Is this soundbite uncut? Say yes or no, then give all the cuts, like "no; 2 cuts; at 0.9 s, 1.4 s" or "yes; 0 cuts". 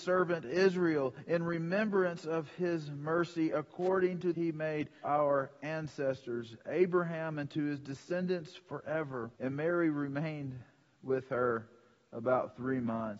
no; 3 cuts; at 4.3 s, 5.0 s, 9.3 s